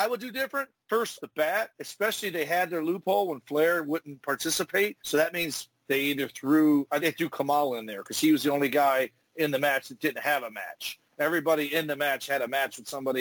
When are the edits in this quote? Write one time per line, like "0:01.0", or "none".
0:01.2
0:05.0
0:07.0

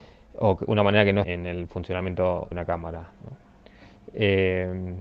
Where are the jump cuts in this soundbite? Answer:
0:01.2
0:02.5

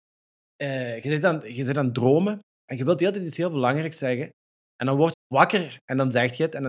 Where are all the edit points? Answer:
0:05.1

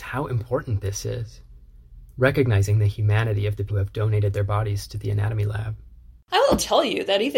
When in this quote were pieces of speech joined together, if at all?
0:03.7
0:06.2

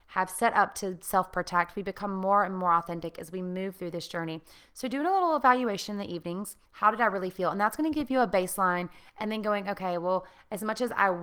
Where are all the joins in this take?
0:06.7

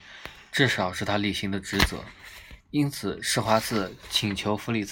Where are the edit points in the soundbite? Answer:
0:02.6

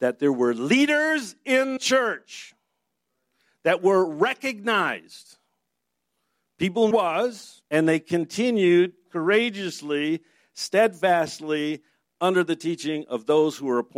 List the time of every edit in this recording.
0:01.8
0:06.9
0:07.6

